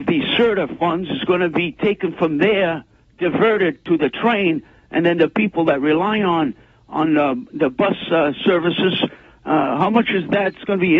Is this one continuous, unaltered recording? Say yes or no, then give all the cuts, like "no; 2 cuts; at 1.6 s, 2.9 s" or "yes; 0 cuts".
yes; 0 cuts